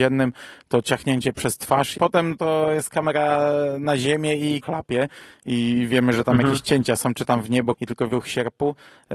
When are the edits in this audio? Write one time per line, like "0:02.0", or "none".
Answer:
0:01.9
0:04.6
0:07.7
0:08.1

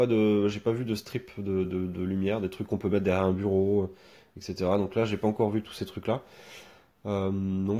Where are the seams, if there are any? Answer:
none

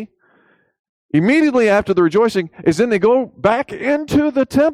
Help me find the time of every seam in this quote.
none

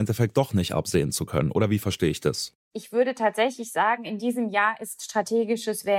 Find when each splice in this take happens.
none

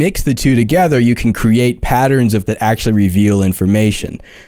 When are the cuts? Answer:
0:02.5

